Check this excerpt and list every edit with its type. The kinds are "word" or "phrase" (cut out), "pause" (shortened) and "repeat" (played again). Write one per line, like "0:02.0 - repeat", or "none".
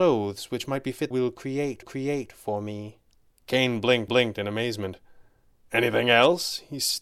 0:01.1 - phrase
0:01.8 - repeat
0:03.1 - pause
0:04.1 - repeat